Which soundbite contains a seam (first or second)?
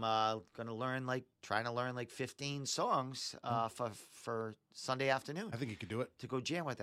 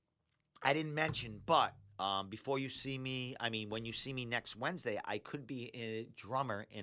first